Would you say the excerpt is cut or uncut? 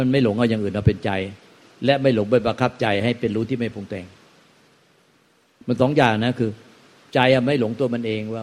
uncut